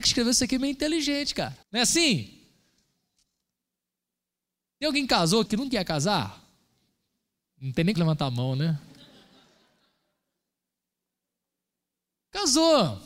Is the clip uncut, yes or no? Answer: no